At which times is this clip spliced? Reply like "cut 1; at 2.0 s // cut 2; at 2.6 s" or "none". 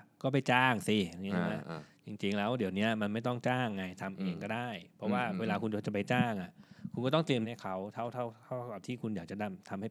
cut 1; at 7.4 s

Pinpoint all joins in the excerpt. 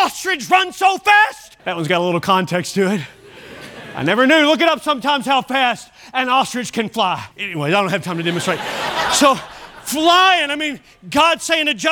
cut 1; at 1.6 s // cut 2; at 7.3 s

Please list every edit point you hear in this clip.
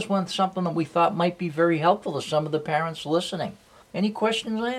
cut 1; at 3.8 s

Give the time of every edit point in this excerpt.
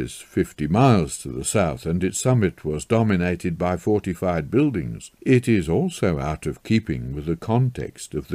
cut 1; at 5.2 s

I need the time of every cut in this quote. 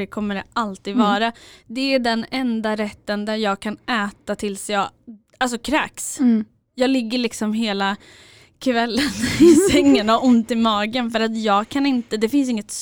none

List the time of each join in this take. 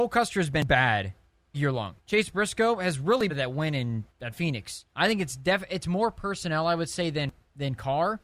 cut 1; at 1.5 s // cut 2; at 2.0 s // cut 3; at 3.3 s // cut 4; at 4.1 s // cut 5; at 4.9 s

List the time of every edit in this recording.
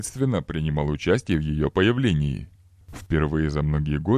none

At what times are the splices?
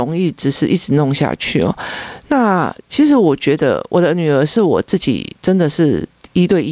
cut 1; at 5.4 s

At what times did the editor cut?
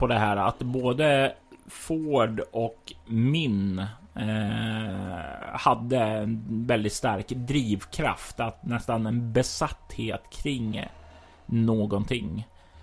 none

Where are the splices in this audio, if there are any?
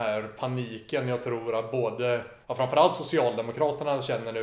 cut 1; at 2.4 s

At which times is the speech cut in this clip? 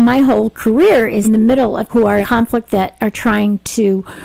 cut 1; at 1.2 s // cut 2; at 1.9 s // cut 3; at 2.2 s

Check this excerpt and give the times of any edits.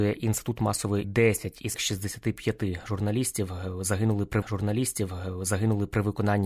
cut 1; at 1.0 s // cut 2; at 1.7 s // cut 3; at 4.4 s

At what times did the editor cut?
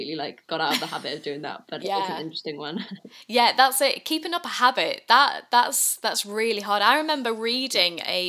cut 1; at 1.8 s

